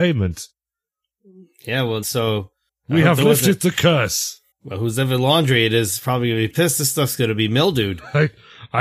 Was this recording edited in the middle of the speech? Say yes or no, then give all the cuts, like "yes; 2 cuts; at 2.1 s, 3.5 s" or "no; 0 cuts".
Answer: yes; 4 cuts; at 2.0 s, 2.7 s, 4.5 s, 6.5 s